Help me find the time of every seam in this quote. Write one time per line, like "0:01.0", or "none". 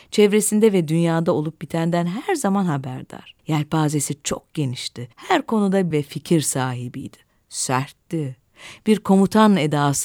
0:03.4
0:05.1
0:05.9